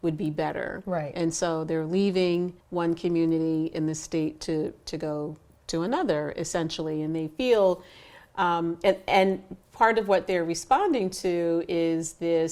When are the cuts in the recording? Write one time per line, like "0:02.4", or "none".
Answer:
0:02.6